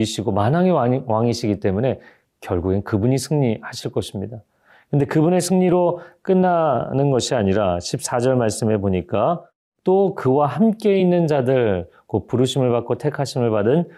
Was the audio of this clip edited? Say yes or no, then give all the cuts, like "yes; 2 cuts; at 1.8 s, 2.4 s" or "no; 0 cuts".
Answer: no; 0 cuts